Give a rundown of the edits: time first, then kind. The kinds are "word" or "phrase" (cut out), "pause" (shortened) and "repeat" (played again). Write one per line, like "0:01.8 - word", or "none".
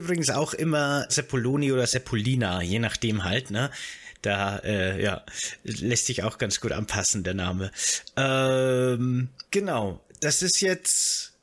0:01.1 - word
0:09.5 - pause